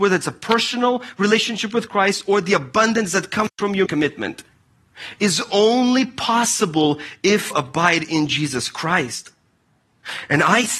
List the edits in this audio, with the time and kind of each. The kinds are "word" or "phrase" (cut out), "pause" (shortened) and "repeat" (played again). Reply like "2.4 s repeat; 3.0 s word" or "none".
3.9 s word; 7.5 s word